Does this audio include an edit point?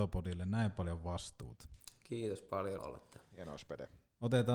yes; 1 cut; at 2.8 s

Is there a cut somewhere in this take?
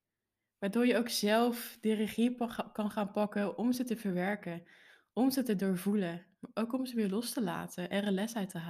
no; 0 cuts

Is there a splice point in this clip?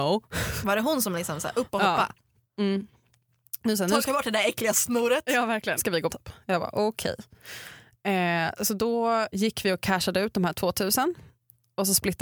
yes; 3 cuts; at 5.8 s, 6.1 s, 9.3 s

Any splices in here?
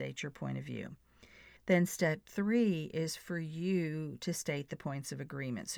yes; 1 cut; at 1.6 s

